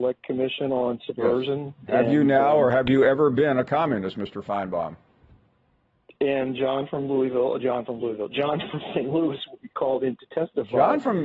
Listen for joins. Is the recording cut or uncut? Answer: uncut